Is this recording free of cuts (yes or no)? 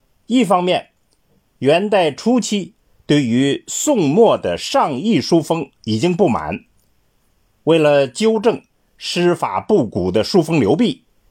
yes